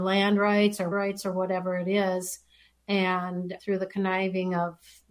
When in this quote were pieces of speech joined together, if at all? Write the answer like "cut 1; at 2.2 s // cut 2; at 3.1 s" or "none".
cut 1; at 0.9 s // cut 2; at 3.6 s